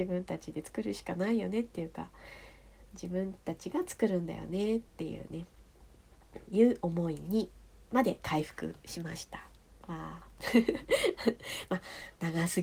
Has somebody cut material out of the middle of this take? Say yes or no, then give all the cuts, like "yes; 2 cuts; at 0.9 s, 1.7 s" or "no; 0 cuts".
yes; 1 cut; at 4.9 s